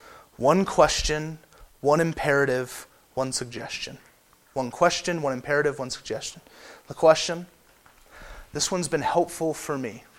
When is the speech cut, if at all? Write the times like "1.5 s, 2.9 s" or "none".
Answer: none